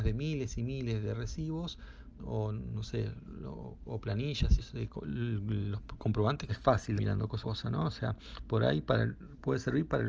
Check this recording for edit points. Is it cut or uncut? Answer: cut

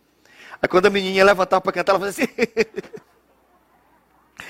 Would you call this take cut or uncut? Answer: cut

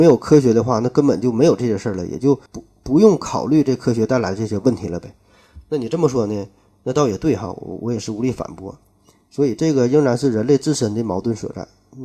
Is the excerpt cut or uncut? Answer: cut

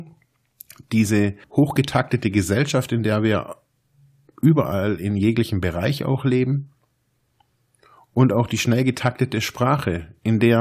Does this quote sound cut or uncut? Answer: cut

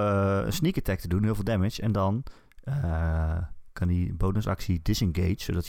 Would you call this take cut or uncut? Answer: uncut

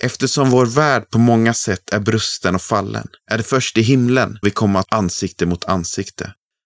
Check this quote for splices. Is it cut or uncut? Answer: cut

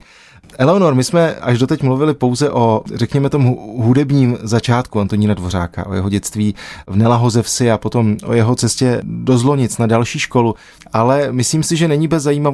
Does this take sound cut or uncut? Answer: uncut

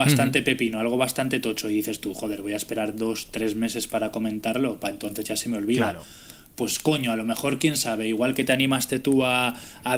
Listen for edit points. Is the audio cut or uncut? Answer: uncut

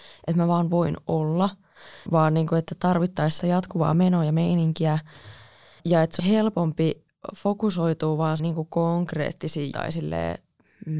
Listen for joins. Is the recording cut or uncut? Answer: cut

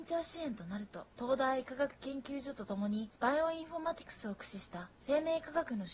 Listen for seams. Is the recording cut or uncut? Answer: cut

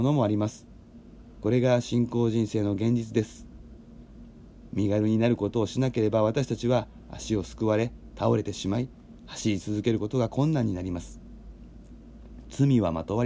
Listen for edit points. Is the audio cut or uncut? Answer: cut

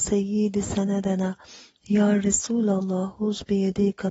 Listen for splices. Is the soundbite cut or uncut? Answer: uncut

